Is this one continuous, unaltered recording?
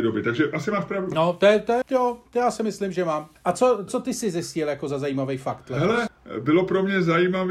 no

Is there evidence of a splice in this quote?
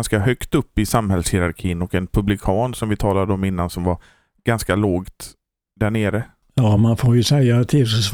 no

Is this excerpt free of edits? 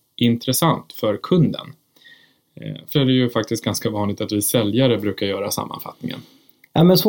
no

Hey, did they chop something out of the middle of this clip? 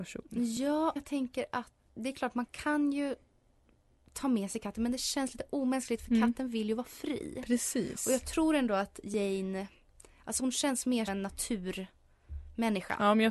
yes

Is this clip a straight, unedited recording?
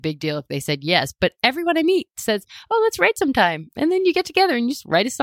yes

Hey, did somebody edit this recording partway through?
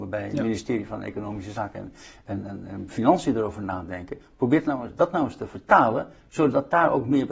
no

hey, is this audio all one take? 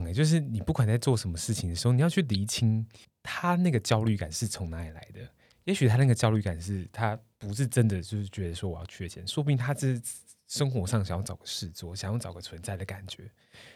no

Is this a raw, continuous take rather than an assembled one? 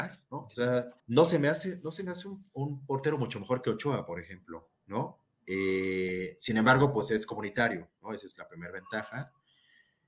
no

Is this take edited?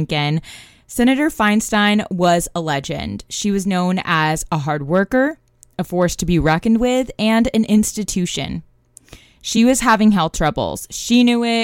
no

